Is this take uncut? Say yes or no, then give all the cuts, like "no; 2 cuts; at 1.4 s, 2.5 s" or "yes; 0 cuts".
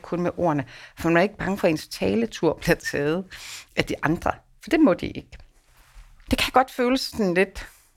yes; 0 cuts